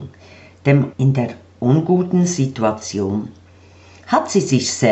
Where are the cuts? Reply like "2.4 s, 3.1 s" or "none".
0.9 s